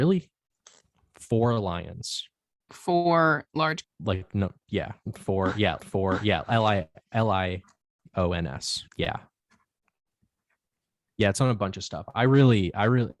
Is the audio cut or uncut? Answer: cut